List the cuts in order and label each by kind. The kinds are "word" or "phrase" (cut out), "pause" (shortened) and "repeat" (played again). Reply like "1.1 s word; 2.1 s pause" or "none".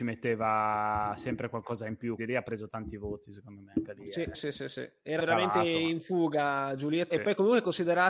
2.2 s word; 4.3 s word; 5.2 s word; 7.1 s word